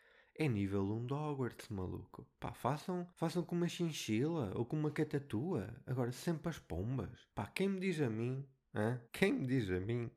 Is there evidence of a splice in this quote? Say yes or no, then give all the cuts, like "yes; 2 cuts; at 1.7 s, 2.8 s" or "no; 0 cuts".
yes; 3 cuts; at 3.1 s, 7.3 s, 9.1 s